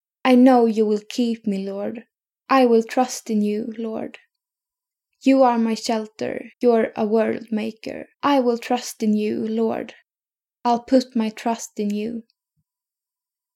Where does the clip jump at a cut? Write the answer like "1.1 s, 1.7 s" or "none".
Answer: 2.1 s, 6.5 s, 8.1 s